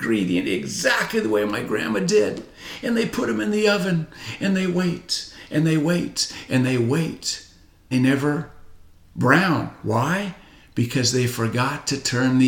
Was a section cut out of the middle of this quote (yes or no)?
yes